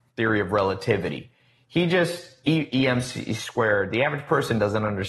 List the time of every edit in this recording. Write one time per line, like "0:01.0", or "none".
none